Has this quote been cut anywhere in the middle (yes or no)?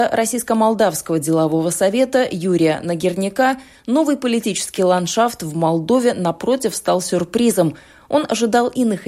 no